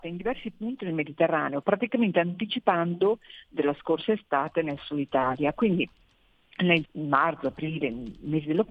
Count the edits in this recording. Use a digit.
2